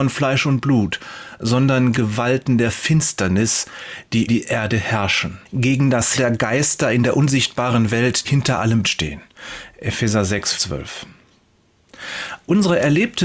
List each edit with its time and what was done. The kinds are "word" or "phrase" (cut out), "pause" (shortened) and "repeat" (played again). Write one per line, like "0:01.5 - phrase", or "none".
0:01.9 - phrase
0:04.3 - word
0:05.4 - pause
0:06.1 - word
0:08.2 - word
0:08.8 - word
0:10.5 - word